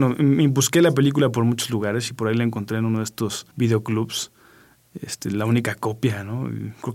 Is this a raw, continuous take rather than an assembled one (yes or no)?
no